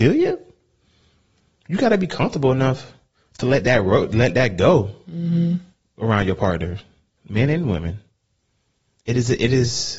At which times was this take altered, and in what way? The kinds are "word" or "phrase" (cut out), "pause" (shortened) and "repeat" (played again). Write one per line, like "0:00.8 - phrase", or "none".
none

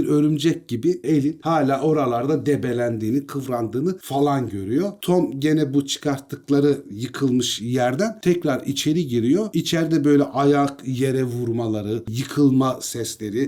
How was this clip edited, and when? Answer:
0:01.0 - phrase

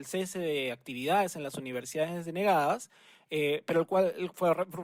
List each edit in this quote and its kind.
none

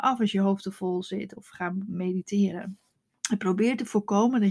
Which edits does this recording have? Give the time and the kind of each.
0:02.9 - pause

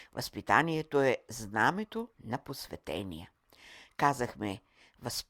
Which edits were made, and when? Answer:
0:02.1 - pause

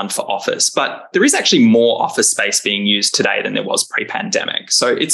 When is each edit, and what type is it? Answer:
none

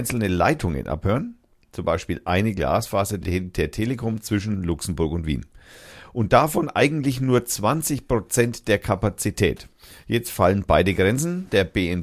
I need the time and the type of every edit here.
0:03.2 - word

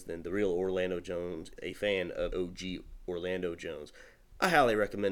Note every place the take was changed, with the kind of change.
0:01.6 - word
0:02.3 - word

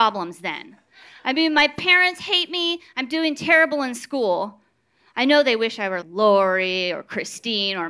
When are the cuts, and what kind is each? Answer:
0:06.0 - word

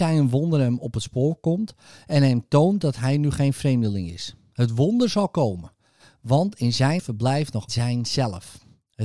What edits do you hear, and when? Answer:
0:07.0 - word
0:07.7 - word

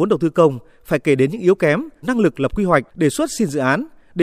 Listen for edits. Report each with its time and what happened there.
0:02.0 - word
0:02.9 - pause

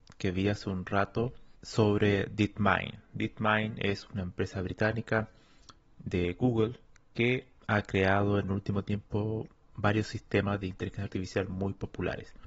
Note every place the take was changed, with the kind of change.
0:07.6 - pause

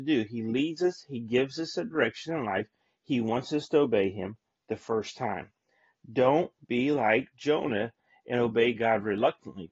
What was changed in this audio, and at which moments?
none

